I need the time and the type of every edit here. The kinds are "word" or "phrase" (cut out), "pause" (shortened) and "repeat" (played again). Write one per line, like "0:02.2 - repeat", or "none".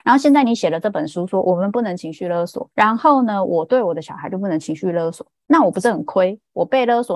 0:02.7 - pause